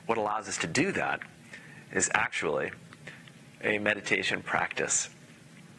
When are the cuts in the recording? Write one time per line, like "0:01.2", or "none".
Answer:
none